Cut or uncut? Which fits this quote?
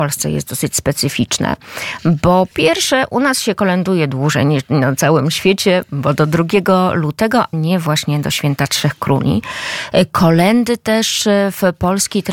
cut